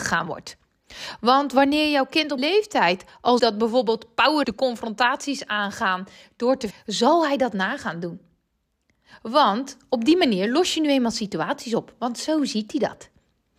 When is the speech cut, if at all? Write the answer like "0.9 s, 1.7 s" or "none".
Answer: 2.4 s, 3.4 s, 4.4 s, 6.7 s